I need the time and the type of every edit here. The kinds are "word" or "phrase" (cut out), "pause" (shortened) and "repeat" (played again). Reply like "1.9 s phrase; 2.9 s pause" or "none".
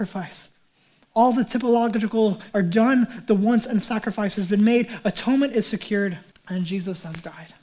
2.5 s word; 3.8 s word; 6.3 s pause